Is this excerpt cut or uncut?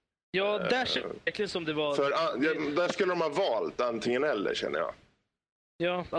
uncut